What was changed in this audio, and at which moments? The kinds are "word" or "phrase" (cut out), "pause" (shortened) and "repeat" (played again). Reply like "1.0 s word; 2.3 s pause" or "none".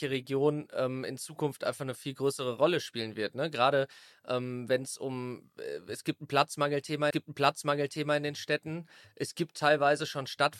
7.1 s repeat